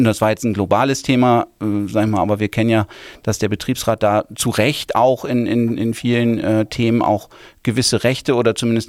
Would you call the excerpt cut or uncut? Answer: uncut